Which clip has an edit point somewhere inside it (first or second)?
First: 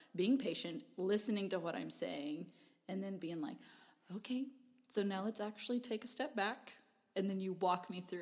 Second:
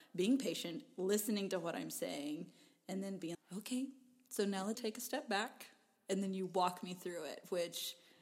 second